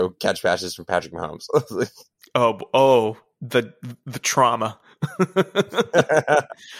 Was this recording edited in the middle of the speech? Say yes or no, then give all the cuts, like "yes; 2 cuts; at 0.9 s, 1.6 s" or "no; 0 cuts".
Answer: no; 0 cuts